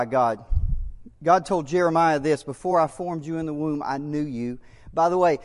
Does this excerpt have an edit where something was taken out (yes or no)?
no